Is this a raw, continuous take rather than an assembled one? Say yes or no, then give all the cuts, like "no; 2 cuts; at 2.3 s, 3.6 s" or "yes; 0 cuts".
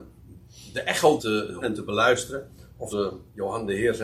no; 3 cuts; at 1.2 s, 1.6 s, 2.9 s